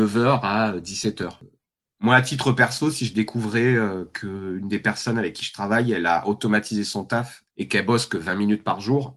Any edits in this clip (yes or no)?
no